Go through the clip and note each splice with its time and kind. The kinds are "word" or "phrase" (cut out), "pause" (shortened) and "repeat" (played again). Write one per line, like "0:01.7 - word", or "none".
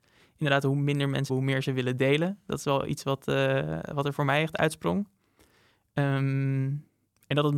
0:01.3 - word